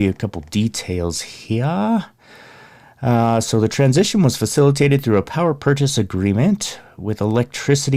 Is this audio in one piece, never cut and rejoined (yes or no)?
yes